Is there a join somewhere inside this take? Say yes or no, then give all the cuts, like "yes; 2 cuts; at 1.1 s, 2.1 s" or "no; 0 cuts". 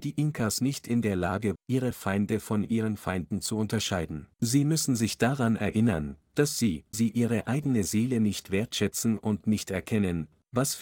yes; 3 cuts; at 1.6 s, 4.3 s, 6.9 s